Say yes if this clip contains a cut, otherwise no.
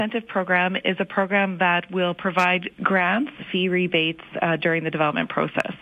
yes